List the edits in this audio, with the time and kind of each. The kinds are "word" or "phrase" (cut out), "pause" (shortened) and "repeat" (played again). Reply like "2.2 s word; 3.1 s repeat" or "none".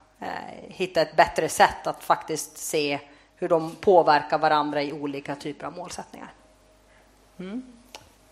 none